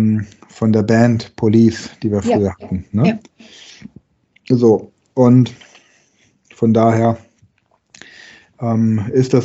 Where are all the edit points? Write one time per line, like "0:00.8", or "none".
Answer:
none